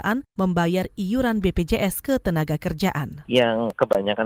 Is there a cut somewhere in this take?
no; 0 cuts

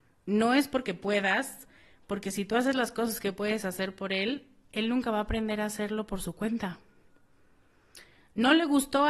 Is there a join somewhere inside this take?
no; 0 cuts

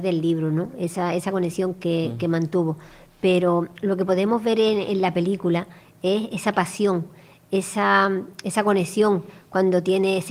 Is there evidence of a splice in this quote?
no; 0 cuts

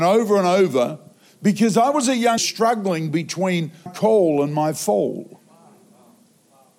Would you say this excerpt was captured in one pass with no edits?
no; 2 cuts; at 2.4 s, 3.9 s

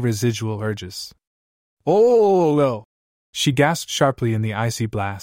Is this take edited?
no; 0 cuts

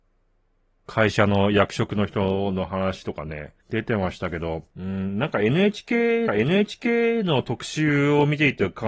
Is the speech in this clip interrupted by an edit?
yes; 3 cuts; at 3.6 s, 4.7 s, 6.3 s

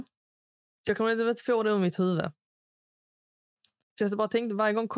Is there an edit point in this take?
no; 0 cuts

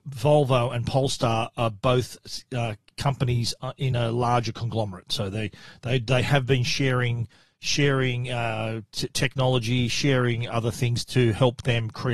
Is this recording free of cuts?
yes; 0 cuts

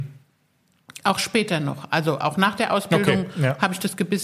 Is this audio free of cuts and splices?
yes; 0 cuts

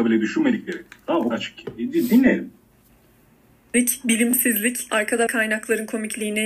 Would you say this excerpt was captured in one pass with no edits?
no; 3 cuts; at 1.3 s, 4.9 s, 5.3 s

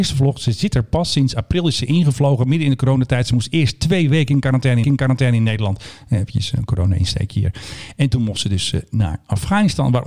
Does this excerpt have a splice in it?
yes; 1 cut; at 4.8 s

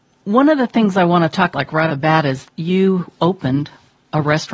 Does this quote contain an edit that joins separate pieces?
yes; 3 cuts; at 1.5 s, 1.9 s, 2.5 s

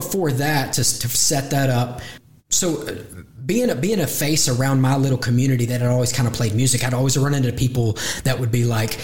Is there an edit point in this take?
no; 0 cuts

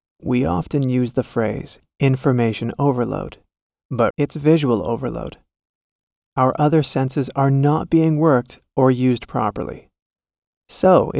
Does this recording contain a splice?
yes; 1 cut; at 4.1 s

